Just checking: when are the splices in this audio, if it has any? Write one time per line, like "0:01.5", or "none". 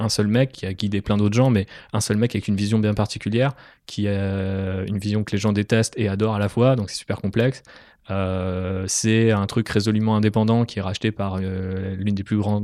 none